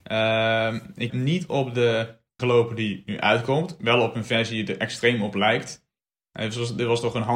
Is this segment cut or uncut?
cut